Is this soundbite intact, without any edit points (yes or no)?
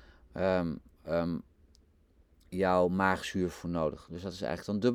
yes